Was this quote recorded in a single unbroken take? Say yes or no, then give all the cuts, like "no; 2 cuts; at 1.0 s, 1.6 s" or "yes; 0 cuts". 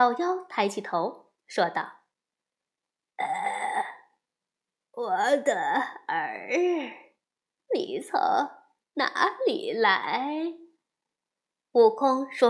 yes; 0 cuts